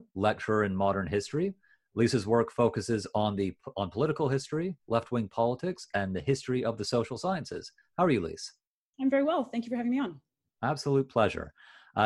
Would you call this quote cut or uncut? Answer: uncut